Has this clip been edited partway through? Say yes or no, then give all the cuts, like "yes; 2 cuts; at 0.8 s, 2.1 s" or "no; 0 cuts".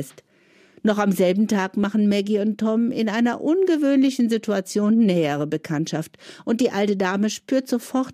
no; 0 cuts